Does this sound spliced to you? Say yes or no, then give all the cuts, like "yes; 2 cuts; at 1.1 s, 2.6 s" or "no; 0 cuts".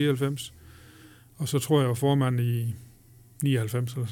no; 0 cuts